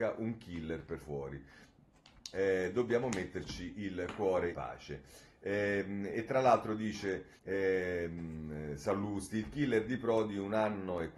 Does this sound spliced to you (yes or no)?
yes